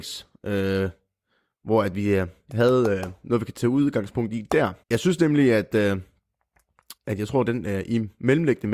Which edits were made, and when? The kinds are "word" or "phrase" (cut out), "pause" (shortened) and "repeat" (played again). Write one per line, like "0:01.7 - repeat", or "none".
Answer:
0:04.8 - pause
0:07.0 - pause